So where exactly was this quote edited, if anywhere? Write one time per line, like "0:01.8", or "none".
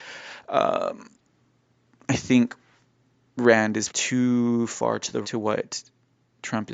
0:03.9
0:05.2